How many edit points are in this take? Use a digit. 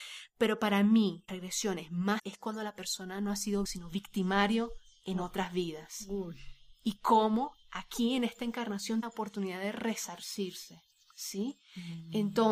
4